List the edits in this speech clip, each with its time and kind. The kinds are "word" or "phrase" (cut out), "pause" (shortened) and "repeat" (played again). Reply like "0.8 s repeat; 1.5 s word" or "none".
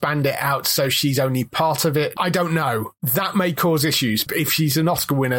4.2 s word

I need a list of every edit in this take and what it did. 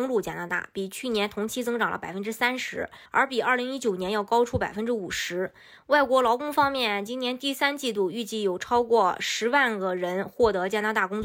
3.1 s pause

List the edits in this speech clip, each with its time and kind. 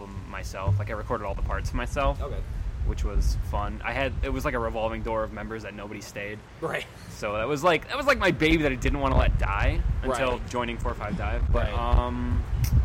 none

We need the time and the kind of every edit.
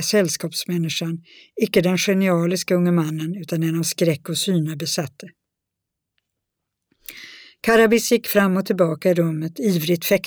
none

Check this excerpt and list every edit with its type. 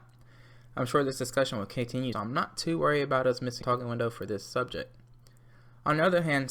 2.1 s phrase; 3.6 s word

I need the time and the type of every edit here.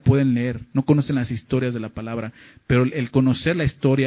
none

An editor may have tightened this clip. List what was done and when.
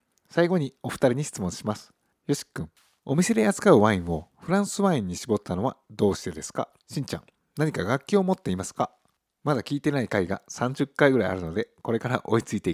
6.8 s pause

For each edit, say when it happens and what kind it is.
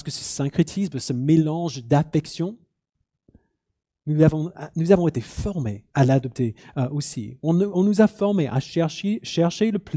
5.9 s pause

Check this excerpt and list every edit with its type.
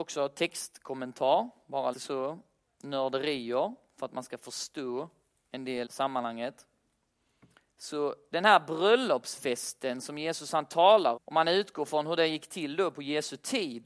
1.9 s word; 5.9 s word; 11.2 s word

